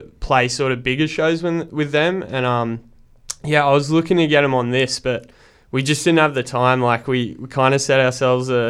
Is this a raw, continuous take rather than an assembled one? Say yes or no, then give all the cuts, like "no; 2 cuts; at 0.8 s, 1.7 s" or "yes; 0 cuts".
yes; 0 cuts